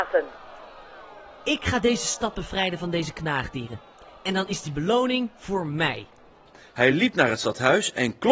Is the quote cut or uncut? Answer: uncut